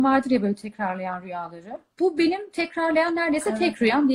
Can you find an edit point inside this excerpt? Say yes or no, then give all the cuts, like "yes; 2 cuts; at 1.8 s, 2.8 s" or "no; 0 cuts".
no; 0 cuts